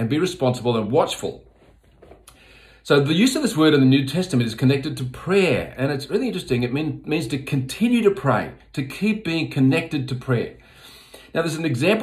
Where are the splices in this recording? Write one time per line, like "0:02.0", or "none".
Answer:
none